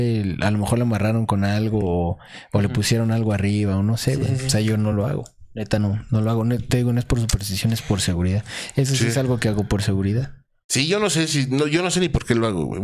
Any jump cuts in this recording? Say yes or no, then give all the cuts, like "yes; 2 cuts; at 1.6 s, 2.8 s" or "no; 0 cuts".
no; 0 cuts